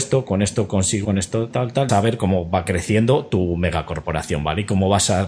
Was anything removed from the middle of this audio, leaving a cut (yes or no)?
yes